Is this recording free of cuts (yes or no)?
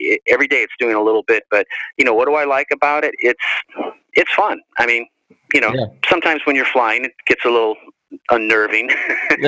yes